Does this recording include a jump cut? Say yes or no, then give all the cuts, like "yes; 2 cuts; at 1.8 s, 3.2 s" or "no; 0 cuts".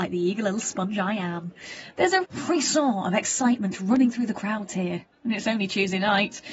yes; 1 cut; at 2.2 s